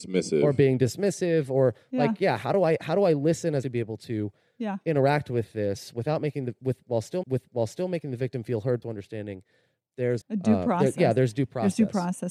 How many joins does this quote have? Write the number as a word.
four